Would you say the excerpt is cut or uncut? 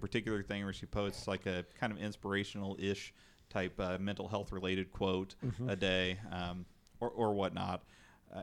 uncut